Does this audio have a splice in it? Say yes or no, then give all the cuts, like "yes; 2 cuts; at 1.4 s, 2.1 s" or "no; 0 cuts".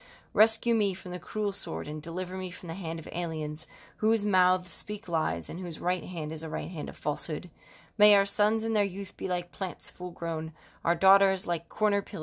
no; 0 cuts